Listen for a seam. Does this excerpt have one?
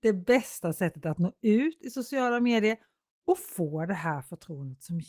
no; 0 cuts

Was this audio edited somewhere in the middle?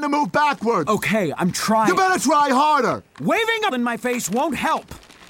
yes; 1 cut; at 3.7 s

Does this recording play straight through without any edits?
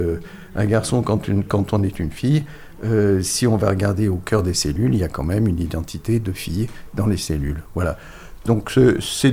yes; 0 cuts

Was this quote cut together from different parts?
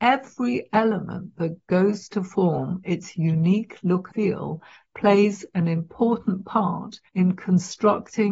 yes; 2 cuts; at 4.1 s, 7.1 s

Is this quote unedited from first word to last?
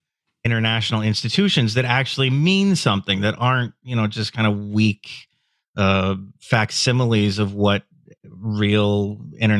yes; 0 cuts

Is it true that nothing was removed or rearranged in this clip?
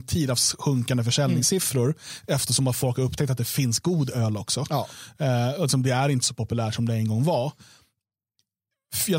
yes; 0 cuts

